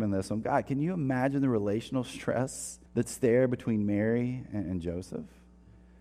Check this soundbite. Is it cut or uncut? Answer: cut